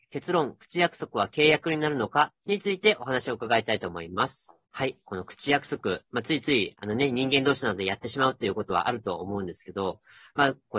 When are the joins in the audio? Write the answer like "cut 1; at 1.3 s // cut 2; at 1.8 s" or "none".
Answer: cut 1; at 2.4 s // cut 2; at 4.7 s